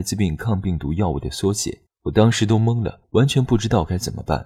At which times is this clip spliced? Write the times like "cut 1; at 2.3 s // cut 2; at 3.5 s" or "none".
cut 1; at 1.9 s // cut 2; at 3.0 s